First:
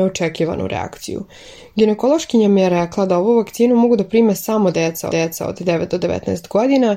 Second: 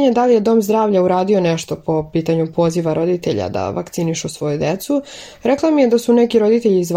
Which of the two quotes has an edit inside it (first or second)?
first